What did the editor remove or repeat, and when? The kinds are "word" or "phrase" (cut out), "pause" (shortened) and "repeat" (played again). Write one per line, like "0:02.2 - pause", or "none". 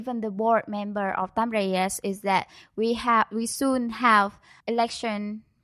0:04.6 - word